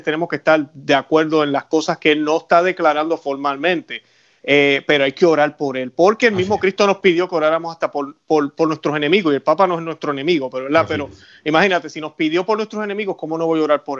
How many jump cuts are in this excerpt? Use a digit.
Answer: 0